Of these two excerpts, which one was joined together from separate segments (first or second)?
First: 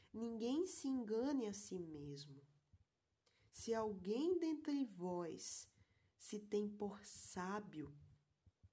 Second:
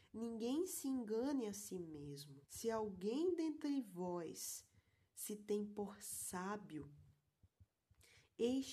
second